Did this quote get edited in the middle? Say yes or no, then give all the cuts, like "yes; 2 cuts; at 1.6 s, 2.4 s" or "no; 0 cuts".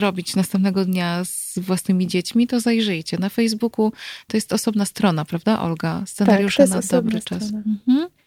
no; 0 cuts